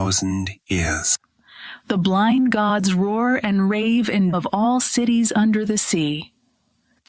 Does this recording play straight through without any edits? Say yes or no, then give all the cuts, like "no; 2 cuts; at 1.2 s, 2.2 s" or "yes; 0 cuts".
no; 1 cut; at 4.3 s